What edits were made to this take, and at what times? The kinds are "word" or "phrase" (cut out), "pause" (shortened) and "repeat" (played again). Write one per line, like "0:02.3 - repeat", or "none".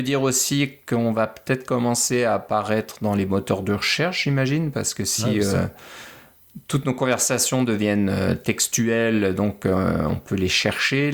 none